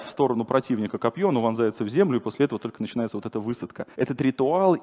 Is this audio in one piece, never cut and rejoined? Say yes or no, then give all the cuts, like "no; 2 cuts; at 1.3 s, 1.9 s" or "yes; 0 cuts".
no; 1 cut; at 3.9 s